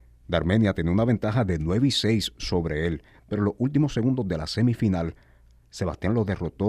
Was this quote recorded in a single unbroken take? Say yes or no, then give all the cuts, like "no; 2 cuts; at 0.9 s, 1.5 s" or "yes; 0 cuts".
yes; 0 cuts